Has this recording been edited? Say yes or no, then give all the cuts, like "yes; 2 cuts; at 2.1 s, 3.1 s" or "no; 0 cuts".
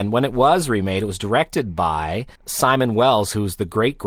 yes; 1 cut; at 2.4 s